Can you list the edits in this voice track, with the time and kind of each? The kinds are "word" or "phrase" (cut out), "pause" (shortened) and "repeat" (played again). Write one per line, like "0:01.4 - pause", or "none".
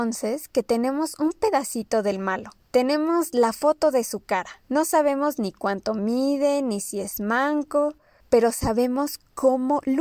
none